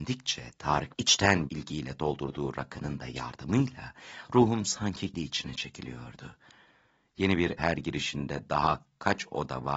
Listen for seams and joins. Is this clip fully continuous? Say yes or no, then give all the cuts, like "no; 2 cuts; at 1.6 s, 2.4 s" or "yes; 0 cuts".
no; 4 cuts; at 0.9 s, 1.5 s, 5.1 s, 7.6 s